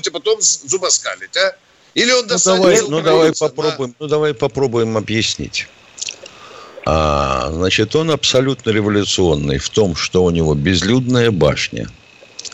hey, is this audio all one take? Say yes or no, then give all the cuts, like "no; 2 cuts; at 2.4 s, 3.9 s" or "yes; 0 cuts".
yes; 0 cuts